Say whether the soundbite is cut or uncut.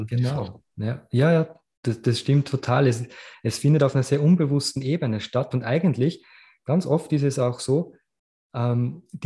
uncut